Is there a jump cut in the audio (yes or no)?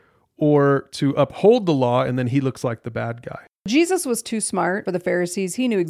no